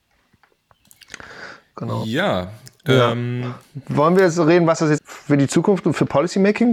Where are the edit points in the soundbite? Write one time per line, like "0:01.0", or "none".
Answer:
0:05.0